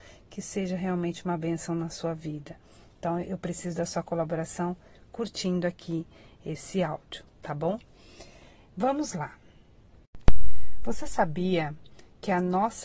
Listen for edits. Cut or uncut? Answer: uncut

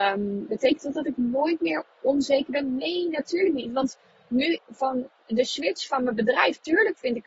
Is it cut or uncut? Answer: cut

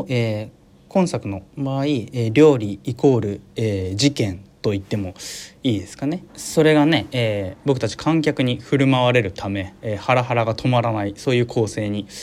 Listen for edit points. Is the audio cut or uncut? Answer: cut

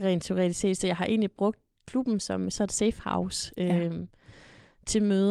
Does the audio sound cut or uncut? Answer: uncut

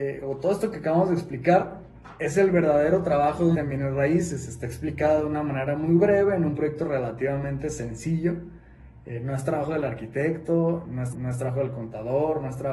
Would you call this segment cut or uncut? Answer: cut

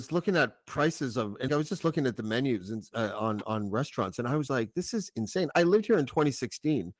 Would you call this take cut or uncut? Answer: cut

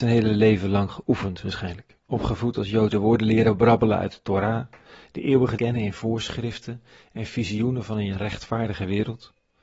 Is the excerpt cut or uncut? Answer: cut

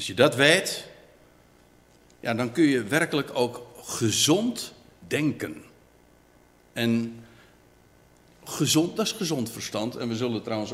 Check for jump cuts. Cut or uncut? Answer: uncut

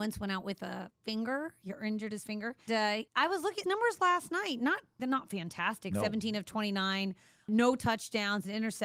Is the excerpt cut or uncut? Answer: cut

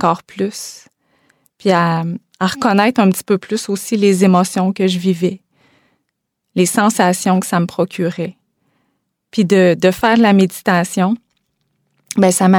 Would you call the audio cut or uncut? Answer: uncut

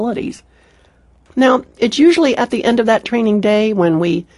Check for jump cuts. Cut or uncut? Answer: uncut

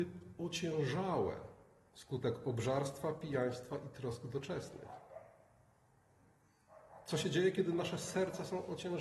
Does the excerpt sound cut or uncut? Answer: uncut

